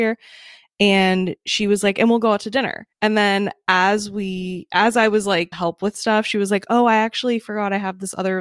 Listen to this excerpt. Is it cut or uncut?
cut